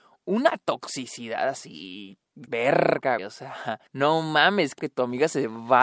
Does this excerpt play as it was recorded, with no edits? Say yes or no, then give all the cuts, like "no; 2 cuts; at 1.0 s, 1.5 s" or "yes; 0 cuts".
no; 4 cuts; at 2.5 s, 3.2 s, 3.9 s, 4.8 s